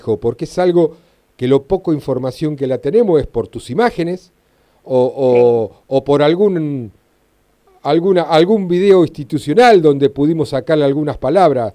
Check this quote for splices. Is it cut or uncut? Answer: uncut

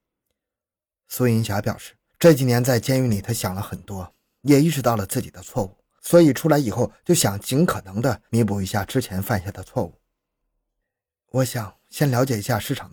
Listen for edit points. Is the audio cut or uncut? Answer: uncut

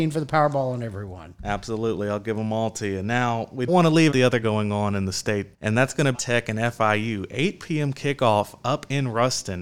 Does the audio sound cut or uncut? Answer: cut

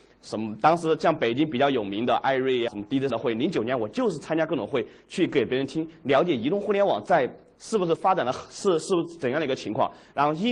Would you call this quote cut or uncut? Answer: cut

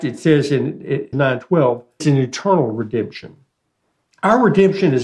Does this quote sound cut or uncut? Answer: cut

